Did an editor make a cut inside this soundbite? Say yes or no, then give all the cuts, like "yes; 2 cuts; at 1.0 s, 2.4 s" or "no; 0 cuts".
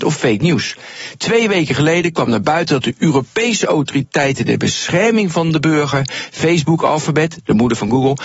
no; 0 cuts